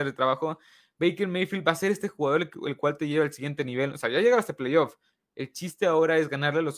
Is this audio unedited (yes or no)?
yes